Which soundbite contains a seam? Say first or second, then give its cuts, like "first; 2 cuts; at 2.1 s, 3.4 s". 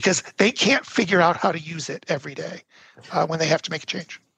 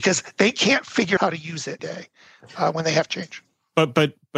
second; 3 cuts; at 1.2 s, 1.8 s, 3.1 s